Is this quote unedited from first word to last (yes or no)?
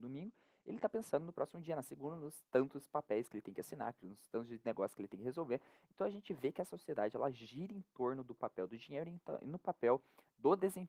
yes